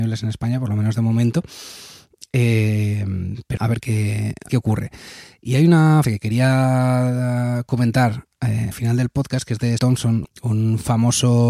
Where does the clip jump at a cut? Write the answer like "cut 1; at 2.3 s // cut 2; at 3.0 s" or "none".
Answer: cut 1; at 3.6 s // cut 2; at 4.5 s // cut 3; at 6.0 s // cut 4; at 8.7 s // cut 5; at 9.8 s // cut 6; at 10.2 s